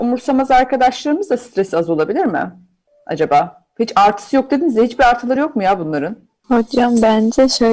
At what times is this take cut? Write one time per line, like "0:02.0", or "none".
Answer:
none